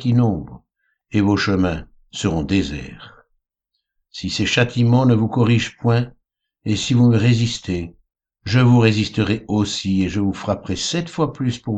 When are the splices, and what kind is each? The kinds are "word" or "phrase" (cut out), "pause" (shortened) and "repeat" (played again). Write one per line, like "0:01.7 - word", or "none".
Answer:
none